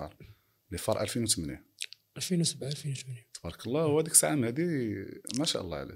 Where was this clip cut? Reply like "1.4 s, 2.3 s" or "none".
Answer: none